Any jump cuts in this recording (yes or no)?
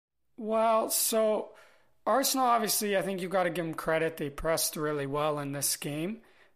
no